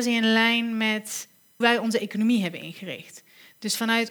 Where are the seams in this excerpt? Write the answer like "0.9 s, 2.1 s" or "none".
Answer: 1.6 s